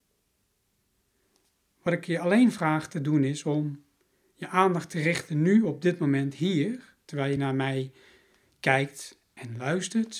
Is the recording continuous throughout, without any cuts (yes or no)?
yes